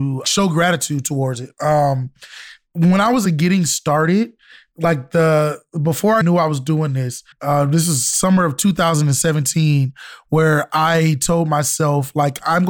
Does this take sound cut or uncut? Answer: cut